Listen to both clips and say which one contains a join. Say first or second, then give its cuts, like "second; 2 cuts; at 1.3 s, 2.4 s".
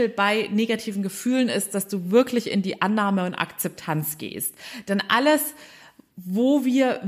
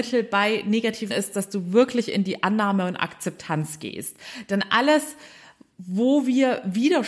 second; 1 cut; at 1.1 s